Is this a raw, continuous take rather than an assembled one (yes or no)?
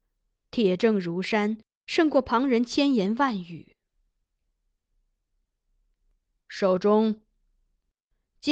yes